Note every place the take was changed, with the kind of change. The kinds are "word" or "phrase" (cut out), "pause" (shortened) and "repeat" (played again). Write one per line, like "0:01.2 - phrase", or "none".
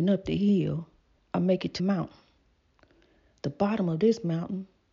0:01.2 - pause
0:01.8 - phrase